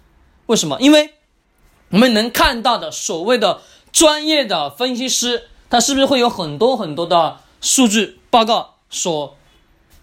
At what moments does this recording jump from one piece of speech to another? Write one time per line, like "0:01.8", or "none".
none